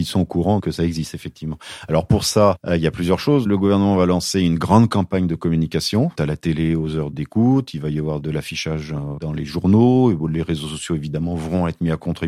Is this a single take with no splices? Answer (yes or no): no